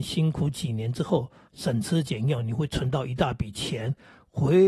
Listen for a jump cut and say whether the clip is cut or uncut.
cut